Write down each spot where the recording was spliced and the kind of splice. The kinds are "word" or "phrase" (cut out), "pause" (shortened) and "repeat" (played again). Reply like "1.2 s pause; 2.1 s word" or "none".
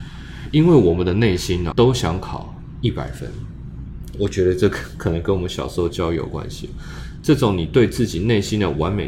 1.7 s word